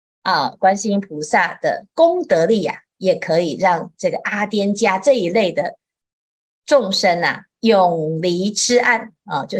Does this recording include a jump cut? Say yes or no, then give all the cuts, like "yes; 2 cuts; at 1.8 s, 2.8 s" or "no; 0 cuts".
no; 0 cuts